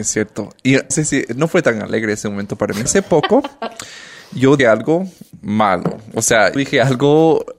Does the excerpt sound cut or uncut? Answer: cut